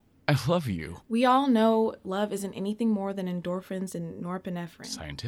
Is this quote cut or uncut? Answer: uncut